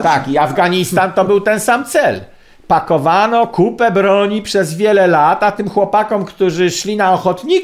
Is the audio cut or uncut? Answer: uncut